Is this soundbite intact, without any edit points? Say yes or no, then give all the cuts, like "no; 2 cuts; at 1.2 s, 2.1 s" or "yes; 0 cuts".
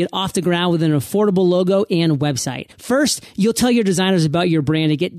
no; 1 cut; at 2.7 s